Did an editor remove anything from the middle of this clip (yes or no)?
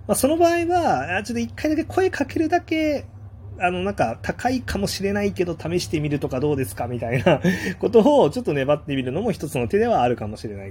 no